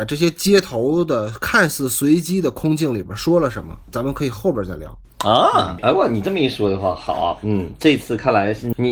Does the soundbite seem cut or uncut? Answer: uncut